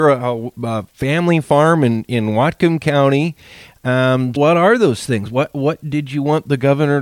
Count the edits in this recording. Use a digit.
1